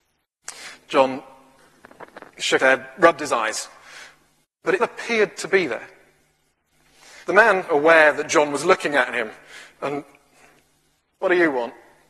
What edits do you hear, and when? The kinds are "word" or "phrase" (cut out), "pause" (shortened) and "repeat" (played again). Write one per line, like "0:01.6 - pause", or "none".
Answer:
0:02.6 - word
0:04.4 - pause
0:04.8 - word
0:07.2 - pause
0:07.7 - phrase